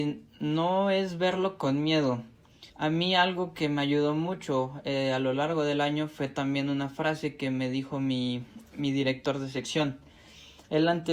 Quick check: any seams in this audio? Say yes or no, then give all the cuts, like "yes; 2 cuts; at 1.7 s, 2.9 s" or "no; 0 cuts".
yes; 1 cut; at 2.7 s